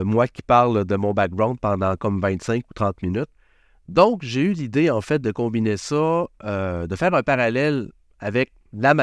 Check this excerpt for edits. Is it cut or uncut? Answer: uncut